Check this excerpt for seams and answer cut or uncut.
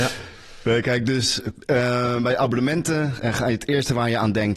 uncut